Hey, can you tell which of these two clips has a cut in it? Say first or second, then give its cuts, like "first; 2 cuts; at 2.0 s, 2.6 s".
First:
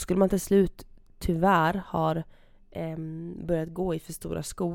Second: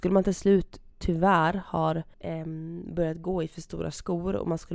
second; 2 cuts; at 0.9 s, 2.1 s